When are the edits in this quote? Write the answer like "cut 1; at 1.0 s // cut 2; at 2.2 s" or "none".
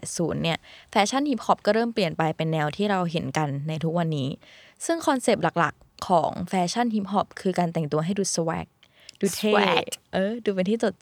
none